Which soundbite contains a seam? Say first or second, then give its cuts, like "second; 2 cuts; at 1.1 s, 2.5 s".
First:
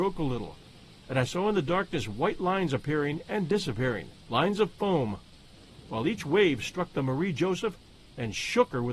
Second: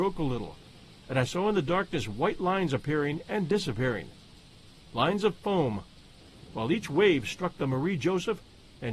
first; 1 cut; at 4.2 s